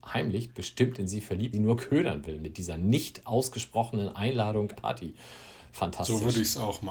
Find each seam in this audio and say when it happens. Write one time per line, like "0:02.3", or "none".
0:01.5
0:04.8